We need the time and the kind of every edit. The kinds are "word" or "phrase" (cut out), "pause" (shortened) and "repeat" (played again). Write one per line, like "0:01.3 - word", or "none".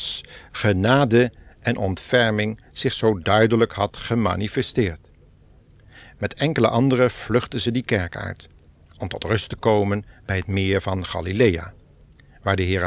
none